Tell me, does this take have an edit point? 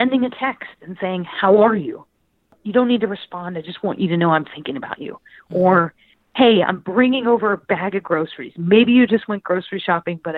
no; 0 cuts

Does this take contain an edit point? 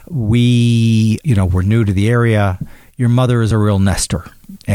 no; 0 cuts

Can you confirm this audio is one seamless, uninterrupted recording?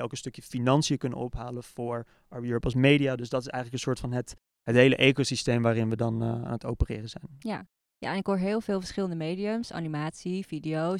yes; 0 cuts

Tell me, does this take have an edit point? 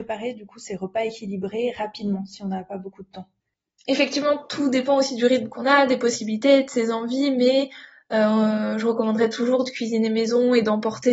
no; 0 cuts

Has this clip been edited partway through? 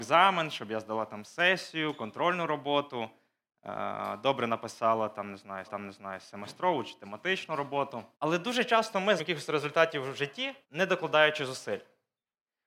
yes; 4 cuts; at 5.6 s, 8.1 s, 9.2 s, 10.6 s

